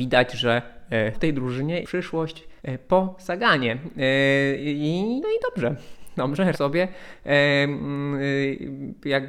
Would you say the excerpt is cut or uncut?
cut